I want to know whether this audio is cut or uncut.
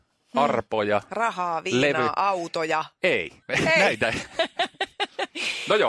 cut